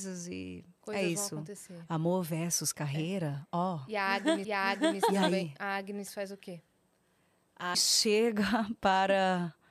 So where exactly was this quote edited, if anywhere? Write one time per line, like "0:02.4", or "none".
0:04.4
0:07.7